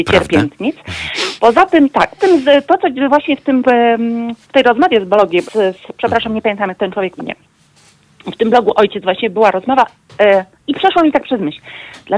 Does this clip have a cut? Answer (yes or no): yes